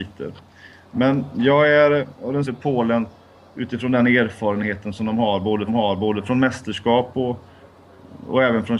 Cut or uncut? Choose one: cut